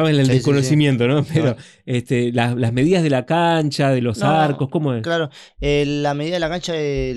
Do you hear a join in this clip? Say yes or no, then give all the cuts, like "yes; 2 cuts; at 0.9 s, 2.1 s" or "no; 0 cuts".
no; 0 cuts